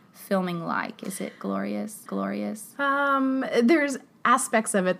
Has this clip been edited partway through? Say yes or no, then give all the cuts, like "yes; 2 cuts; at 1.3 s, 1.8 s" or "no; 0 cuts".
yes; 1 cut; at 2.1 s